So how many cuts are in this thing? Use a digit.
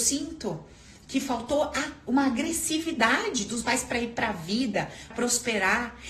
2